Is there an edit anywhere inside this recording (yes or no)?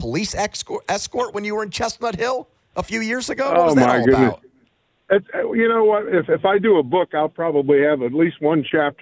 no